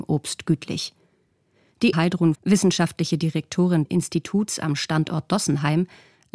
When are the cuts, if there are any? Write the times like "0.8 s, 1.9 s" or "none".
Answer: 1.9 s, 2.3 s, 3.9 s